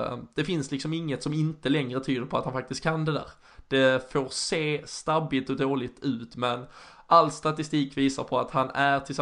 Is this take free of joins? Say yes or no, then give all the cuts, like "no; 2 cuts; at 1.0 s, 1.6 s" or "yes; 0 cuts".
yes; 0 cuts